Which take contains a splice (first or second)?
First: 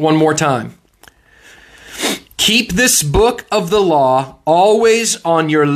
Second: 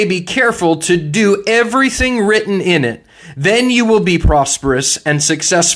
first